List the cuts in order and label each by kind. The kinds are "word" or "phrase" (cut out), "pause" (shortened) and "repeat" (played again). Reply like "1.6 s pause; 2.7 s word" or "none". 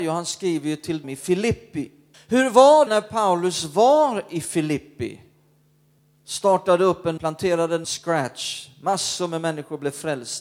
1.0 s word; 2.1 s pause; 2.9 s word; 6.0 s pause; 7.2 s phrase; 7.8 s phrase